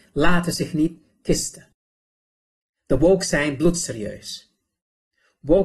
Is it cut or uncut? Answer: uncut